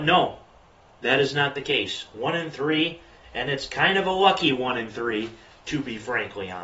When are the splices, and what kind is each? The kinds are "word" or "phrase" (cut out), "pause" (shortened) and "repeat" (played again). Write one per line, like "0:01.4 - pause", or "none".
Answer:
none